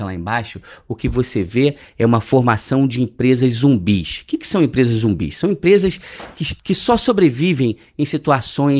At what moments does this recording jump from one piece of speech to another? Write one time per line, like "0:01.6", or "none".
0:06.6